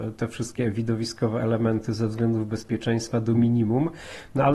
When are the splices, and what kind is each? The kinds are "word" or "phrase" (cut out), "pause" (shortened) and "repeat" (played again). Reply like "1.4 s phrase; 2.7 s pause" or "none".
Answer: none